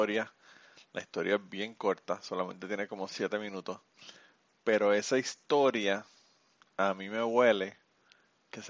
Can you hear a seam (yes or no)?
no